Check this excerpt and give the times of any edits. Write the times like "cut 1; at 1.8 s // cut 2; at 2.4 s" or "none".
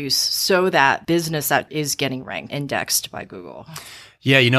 cut 1; at 1.0 s // cut 2; at 1.7 s // cut 3; at 2.5 s